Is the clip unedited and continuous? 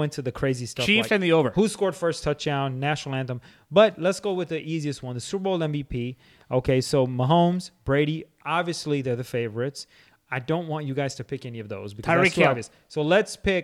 yes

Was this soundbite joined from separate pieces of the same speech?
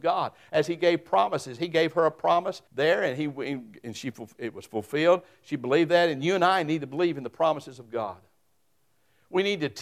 yes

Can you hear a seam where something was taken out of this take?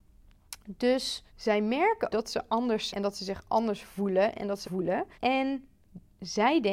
yes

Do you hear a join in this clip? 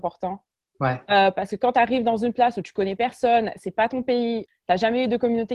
no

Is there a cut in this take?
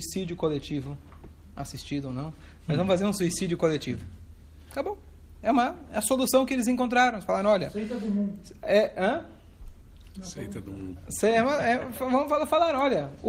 no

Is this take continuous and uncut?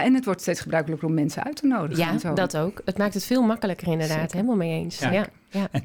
yes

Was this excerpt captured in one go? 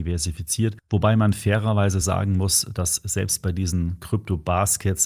yes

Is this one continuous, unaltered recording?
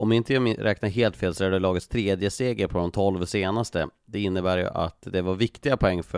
yes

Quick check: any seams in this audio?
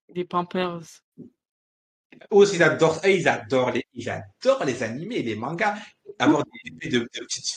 no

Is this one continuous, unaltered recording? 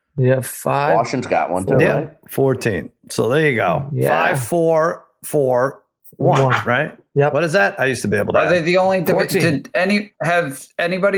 yes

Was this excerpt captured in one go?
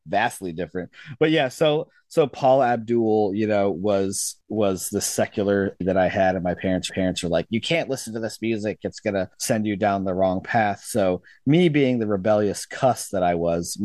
no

